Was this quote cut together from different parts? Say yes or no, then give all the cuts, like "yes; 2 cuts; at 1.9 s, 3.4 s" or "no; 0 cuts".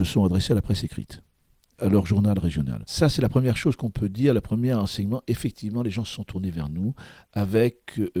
yes; 1 cut; at 1.8 s